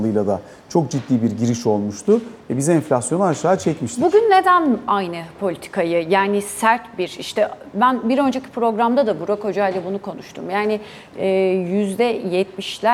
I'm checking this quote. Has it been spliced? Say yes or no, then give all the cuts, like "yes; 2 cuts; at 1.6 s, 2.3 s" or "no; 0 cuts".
no; 0 cuts